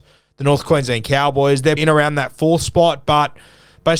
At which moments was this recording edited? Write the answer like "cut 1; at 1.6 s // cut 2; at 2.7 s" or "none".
cut 1; at 1.8 s